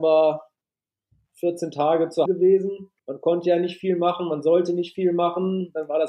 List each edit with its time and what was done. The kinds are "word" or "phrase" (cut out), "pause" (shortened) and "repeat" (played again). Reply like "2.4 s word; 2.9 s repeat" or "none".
2.3 s word; 3.0 s pause